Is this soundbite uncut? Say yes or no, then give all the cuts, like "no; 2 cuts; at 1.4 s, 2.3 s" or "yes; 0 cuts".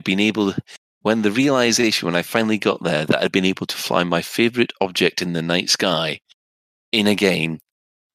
yes; 0 cuts